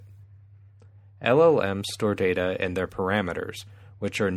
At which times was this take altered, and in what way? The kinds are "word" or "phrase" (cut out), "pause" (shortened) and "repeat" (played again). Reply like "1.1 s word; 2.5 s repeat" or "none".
none